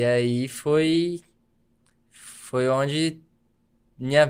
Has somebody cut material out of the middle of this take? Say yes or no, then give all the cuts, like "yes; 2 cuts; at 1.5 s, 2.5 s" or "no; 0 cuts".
no; 0 cuts